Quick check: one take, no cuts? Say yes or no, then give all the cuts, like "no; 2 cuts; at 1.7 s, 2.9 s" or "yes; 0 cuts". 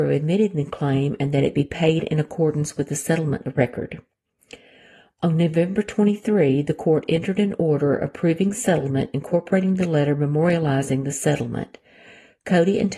yes; 0 cuts